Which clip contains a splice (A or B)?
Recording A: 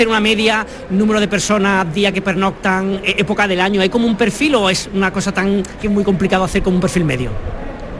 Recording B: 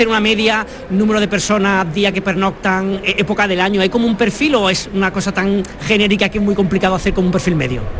A